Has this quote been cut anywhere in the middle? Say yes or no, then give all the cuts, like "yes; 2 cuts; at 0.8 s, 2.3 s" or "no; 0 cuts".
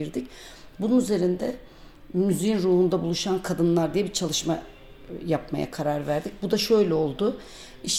no; 0 cuts